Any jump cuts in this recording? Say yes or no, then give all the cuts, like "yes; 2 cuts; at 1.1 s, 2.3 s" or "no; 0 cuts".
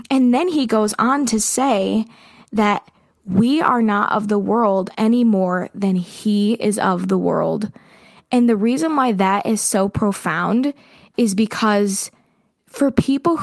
no; 0 cuts